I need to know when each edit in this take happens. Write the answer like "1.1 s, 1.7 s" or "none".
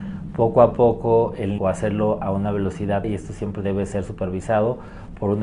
1.6 s, 3.0 s